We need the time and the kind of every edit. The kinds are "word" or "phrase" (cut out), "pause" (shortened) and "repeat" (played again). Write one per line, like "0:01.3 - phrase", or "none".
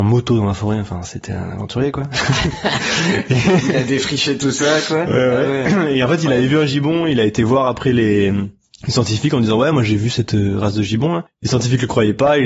none